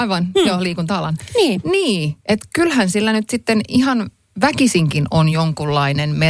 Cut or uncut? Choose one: uncut